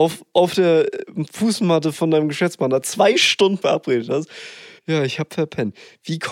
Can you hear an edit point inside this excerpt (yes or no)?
yes